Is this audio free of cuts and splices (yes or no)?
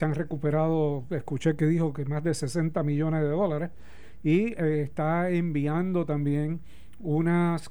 yes